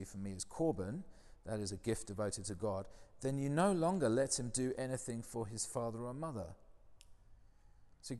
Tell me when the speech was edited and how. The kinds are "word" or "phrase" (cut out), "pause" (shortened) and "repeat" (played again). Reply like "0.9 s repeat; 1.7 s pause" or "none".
none